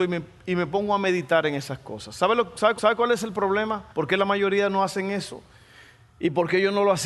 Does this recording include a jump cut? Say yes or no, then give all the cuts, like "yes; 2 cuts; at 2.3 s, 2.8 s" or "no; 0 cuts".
yes; 2 cuts; at 2.8 s, 3.9 s